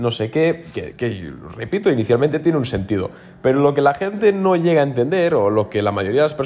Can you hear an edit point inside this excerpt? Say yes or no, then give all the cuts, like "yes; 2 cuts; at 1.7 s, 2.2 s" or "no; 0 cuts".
yes; 1 cut; at 0.9 s